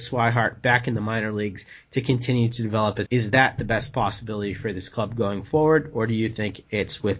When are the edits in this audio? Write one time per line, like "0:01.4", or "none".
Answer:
0:03.1